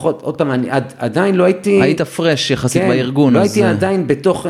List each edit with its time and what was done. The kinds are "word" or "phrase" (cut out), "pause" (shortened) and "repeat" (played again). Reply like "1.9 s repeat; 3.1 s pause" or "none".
none